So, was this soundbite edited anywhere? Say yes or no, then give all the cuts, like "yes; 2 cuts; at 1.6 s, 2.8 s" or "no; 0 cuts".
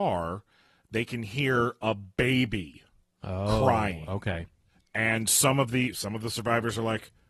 no; 0 cuts